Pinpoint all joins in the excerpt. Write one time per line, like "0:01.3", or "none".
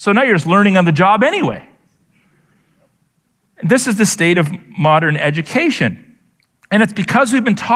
none